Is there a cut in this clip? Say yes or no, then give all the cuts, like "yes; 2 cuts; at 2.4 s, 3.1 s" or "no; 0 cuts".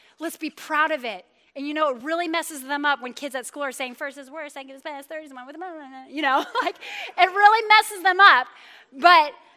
no; 0 cuts